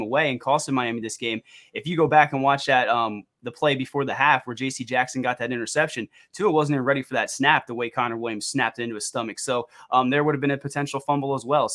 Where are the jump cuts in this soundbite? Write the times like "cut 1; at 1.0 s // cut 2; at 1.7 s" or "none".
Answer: none